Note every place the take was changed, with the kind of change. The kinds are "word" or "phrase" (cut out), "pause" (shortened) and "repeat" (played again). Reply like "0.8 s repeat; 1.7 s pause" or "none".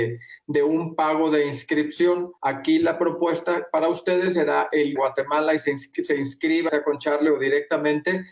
2.4 s pause; 5.0 s phrase; 6.7 s word

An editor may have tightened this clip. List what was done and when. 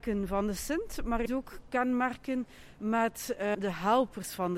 1.3 s word; 3.5 s word

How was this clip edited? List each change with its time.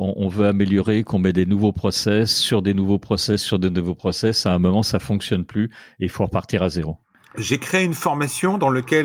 none

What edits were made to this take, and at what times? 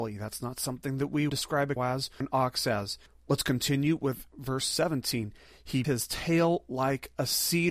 1.3 s word; 1.8 s word; 2.2 s word; 5.8 s word

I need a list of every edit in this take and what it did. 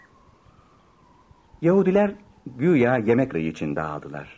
3.3 s word

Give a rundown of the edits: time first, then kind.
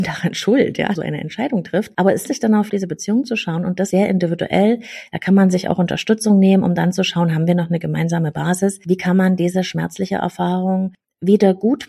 1.0 s phrase; 2.3 s word; 2.7 s phrase; 3.9 s word

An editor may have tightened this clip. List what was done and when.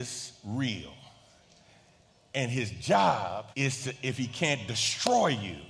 3.5 s pause

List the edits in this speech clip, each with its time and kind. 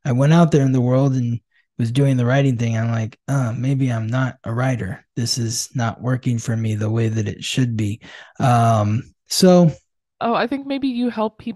none

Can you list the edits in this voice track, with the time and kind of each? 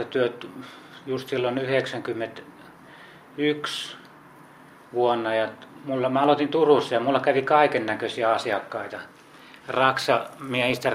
none

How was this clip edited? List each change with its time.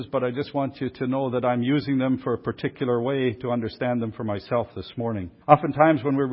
5.4 s pause

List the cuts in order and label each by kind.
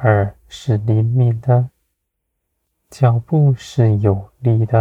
none

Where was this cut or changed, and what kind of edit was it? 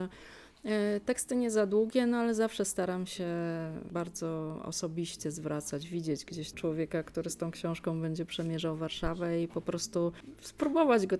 6.5 s phrase

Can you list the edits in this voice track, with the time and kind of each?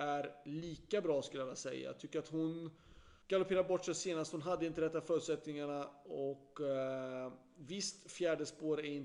3.2 s pause

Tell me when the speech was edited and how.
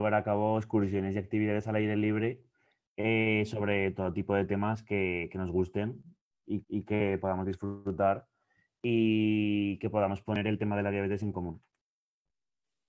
6.6 s repeat

